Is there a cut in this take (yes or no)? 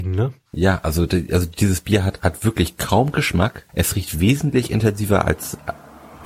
yes